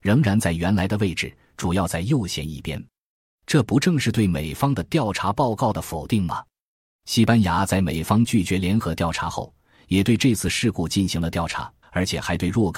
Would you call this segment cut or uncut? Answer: cut